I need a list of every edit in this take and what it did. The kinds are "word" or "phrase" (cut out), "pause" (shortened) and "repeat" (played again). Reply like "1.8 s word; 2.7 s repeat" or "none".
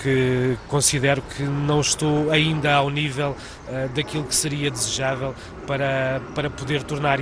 none